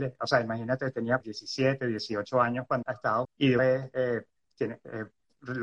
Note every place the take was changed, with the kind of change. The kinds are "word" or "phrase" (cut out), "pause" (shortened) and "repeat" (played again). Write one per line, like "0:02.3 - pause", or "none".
0:01.2 - word
0:02.8 - word
0:03.2 - word
0:03.6 - word